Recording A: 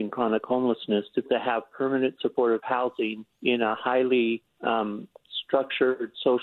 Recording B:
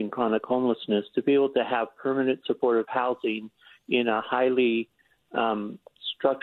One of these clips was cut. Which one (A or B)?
A